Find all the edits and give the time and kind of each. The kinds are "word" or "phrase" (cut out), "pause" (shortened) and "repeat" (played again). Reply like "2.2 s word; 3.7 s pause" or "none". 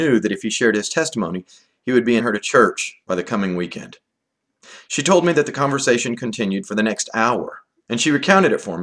2.2 s word; 3.0 s pause; 7.8 s pause